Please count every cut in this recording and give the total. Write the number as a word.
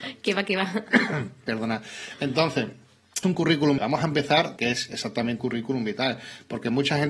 four